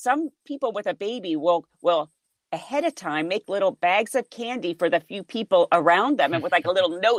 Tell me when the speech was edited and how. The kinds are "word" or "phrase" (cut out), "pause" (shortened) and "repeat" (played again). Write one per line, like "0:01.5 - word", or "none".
none